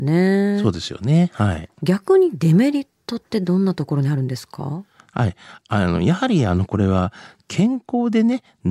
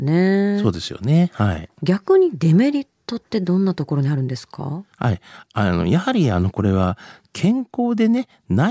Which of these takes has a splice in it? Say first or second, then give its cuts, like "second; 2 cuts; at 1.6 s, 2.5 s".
second; 1 cut; at 4.9 s